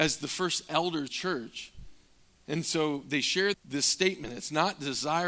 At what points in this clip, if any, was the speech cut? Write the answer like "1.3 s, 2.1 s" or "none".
1.1 s, 3.5 s